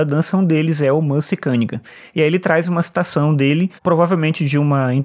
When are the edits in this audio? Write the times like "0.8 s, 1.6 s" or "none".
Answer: 3.8 s